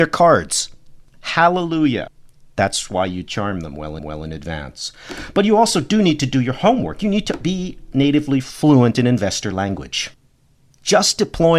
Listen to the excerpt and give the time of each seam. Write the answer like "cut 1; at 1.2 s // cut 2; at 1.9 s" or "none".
cut 1; at 4.0 s